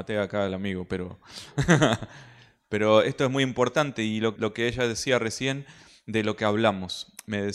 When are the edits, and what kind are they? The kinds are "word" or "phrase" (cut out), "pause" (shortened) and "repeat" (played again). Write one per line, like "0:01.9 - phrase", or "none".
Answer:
0:04.4 - word